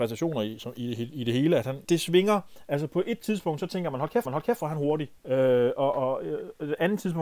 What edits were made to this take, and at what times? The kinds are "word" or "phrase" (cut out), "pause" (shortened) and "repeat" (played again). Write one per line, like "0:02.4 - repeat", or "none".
0:01.8 - word
0:04.2 - repeat
0:05.2 - pause
0:05.9 - word